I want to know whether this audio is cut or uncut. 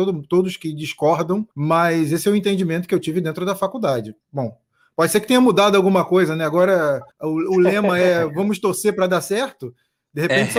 cut